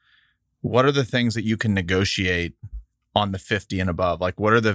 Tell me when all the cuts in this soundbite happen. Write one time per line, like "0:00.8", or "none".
none